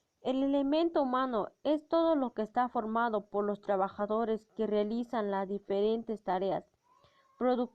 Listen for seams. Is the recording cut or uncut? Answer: uncut